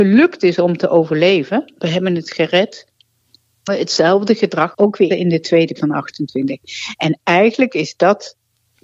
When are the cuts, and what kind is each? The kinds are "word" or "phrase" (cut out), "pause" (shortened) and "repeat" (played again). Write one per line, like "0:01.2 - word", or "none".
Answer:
0:01.8 - word
0:03.7 - word
0:04.7 - word
0:05.1 - word
0:05.8 - word